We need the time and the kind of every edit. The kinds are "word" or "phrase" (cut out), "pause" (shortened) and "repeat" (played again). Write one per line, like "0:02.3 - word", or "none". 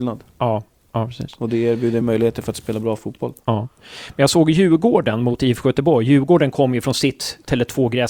0:02.0 - word